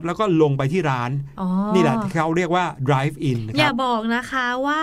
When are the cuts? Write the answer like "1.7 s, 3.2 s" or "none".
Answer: none